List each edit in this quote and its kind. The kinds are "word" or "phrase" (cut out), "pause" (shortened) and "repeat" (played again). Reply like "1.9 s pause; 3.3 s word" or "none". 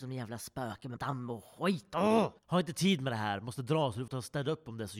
1.0 s word; 2.4 s pause; 4.1 s word